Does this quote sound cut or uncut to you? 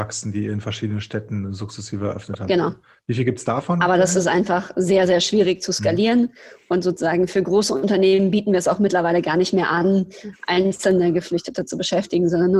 uncut